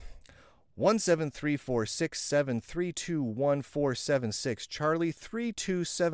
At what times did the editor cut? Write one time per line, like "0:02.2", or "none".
none